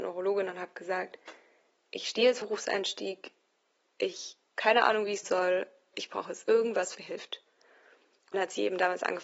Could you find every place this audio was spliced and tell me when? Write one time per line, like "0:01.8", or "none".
0:02.4
0:04.6
0:05.2
0:05.9
0:06.9
0:08.3

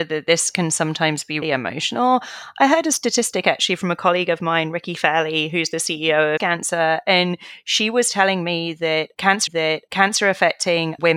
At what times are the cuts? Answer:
0:01.4
0:06.4
0:09.5

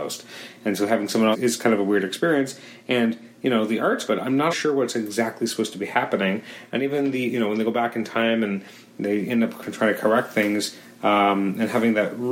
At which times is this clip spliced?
0:01.3
0:04.1
0:04.5

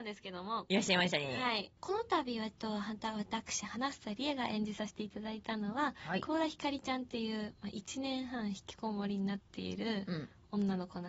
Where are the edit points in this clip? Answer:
0:01.8

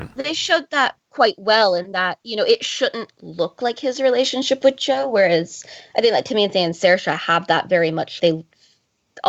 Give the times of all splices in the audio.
0:01.0
0:08.2

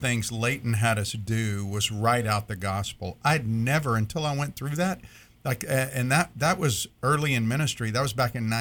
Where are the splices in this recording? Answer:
none

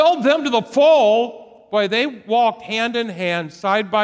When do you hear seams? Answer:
none

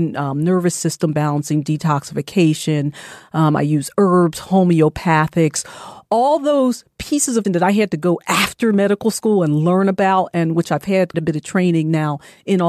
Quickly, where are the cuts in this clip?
0:07.4
0:11.1

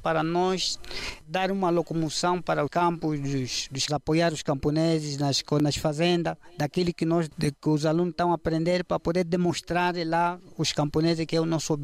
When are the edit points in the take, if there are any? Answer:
0:02.7
0:03.9

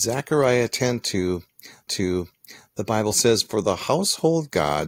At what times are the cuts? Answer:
0:01.9

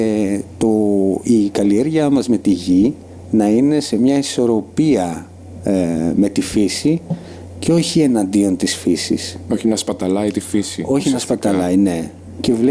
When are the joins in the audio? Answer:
none

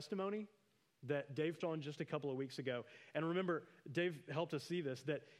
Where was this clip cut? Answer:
0:01.6

